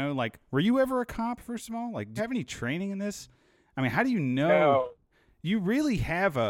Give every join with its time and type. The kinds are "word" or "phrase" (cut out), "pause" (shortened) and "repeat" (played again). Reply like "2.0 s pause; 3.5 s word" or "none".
2.2 s word